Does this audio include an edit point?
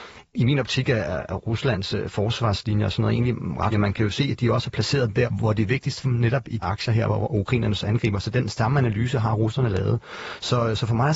yes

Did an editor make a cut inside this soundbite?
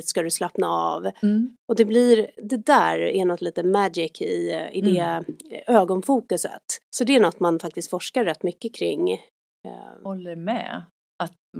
yes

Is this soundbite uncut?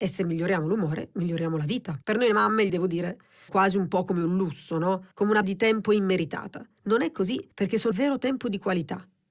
no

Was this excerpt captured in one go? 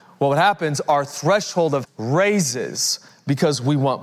no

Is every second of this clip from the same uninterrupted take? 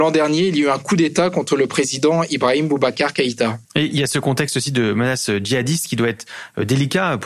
no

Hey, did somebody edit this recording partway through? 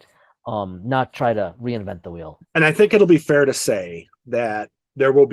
yes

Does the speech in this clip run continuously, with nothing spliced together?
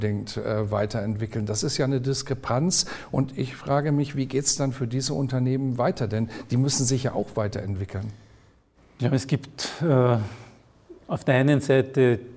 yes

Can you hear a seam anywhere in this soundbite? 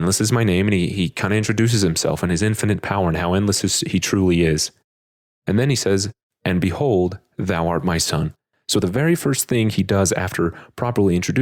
no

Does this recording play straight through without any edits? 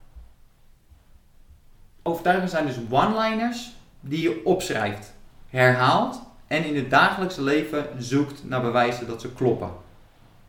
yes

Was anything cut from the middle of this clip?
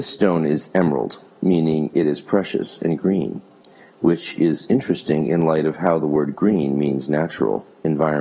no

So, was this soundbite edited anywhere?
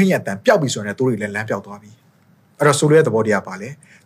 no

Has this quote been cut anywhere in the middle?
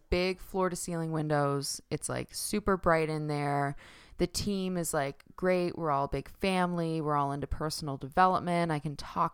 no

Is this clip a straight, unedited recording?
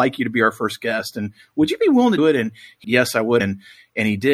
no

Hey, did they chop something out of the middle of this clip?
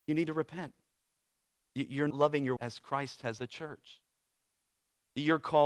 yes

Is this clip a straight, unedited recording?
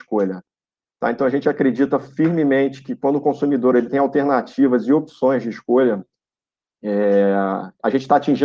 yes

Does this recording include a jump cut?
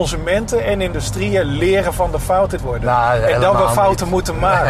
yes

